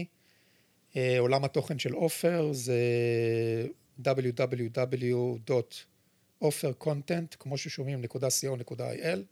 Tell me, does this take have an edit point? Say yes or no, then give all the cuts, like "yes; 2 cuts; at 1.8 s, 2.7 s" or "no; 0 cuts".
no; 0 cuts